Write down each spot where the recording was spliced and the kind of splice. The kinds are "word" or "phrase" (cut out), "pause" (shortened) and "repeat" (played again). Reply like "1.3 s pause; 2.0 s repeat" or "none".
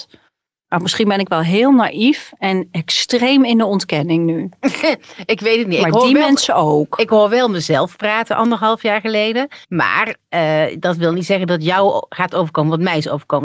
9.6 s pause